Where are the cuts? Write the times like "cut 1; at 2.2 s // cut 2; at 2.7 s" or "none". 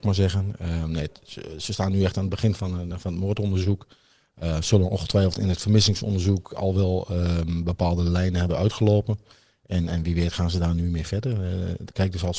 none

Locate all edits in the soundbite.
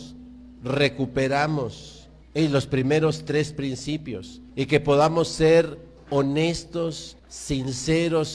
cut 1; at 2.2 s // cut 2; at 4.5 s // cut 3; at 7.2 s

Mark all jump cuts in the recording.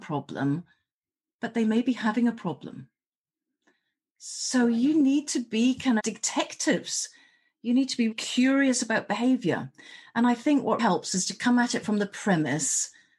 cut 1; at 6.0 s // cut 2; at 8.1 s // cut 3; at 10.8 s

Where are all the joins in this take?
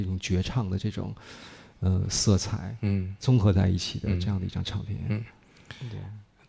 none

